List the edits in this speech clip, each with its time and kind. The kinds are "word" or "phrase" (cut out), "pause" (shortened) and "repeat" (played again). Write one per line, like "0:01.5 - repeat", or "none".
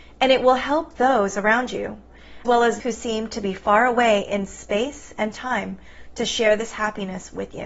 0:02.4 - word
0:02.8 - word